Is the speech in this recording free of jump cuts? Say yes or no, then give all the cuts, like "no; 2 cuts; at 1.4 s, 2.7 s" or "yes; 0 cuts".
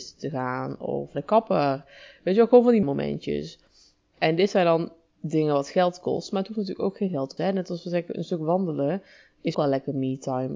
no; 4 cuts; at 1.1 s, 2.8 s, 7.4 s, 9.5 s